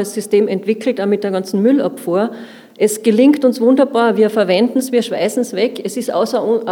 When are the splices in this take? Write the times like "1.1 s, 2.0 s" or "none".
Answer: none